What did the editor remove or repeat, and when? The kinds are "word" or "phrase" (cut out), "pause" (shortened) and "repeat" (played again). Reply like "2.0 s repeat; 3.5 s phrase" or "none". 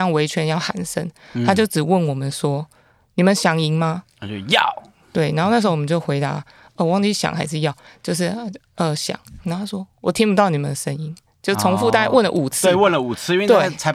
none